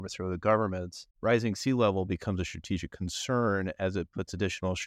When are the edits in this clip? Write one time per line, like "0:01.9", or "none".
0:01.1